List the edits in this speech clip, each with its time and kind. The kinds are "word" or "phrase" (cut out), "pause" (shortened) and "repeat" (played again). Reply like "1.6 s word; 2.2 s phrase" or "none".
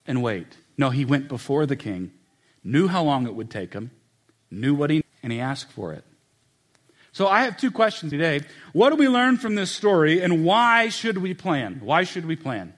5.0 s word; 8.1 s word